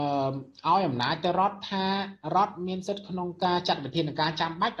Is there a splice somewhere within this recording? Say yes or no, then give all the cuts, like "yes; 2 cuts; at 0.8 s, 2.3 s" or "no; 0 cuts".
no; 0 cuts